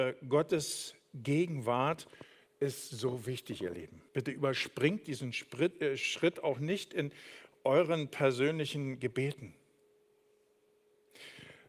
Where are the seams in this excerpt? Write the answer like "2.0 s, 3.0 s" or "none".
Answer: 4.1 s